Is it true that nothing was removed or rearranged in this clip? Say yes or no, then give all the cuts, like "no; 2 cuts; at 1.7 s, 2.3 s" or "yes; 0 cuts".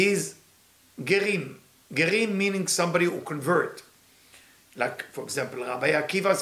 yes; 0 cuts